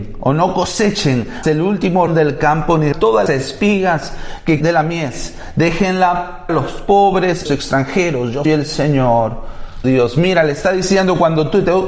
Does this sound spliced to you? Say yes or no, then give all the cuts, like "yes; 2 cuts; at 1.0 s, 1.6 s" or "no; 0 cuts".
yes; 9 cuts; at 1.4 s, 2.1 s, 2.9 s, 3.3 s, 4.6 s, 6.5 s, 7.5 s, 8.5 s, 9.8 s